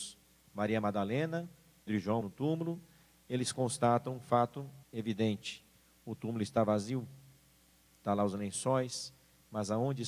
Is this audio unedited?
no; 3 cuts; at 1.9 s, 2.2 s, 4.8 s

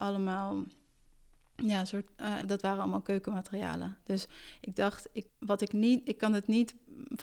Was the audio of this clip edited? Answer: yes; 2 cuts; at 2.4 s, 5.3 s

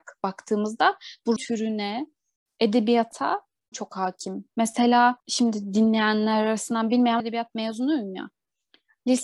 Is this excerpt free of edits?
no; 4 cuts; at 1.4 s, 3.7 s, 5.2 s, 7.2 s

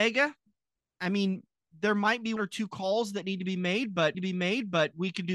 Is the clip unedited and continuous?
no; 2 cuts; at 2.4 s, 4.1 s

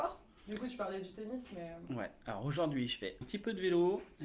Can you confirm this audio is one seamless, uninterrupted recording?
no; 1 cut; at 3.2 s

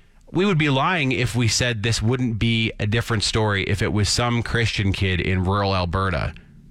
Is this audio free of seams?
yes; 0 cuts

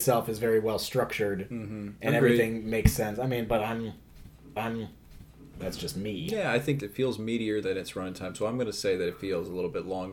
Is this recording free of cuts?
no; 3 cuts; at 4.6 s, 6.8 s, 7.6 s

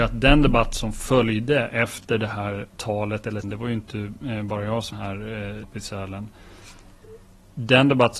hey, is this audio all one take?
no; 4 cuts; at 2.7 s, 3.4 s, 4.9 s, 5.6 s

